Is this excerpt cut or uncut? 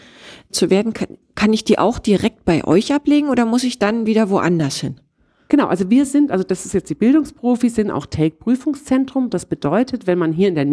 uncut